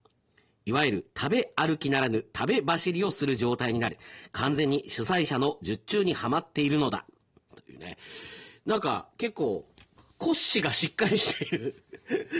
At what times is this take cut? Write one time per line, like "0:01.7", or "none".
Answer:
none